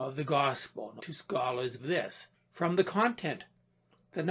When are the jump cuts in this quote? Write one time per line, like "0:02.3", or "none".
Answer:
0:01.0
0:01.8
0:02.3

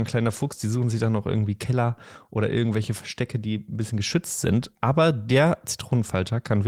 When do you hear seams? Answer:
none

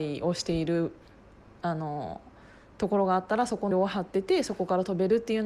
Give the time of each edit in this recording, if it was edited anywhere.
0:03.7

